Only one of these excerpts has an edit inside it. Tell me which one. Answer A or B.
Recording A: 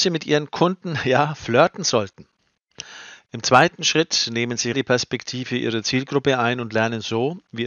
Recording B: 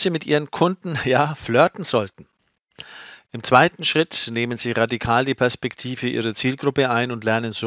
A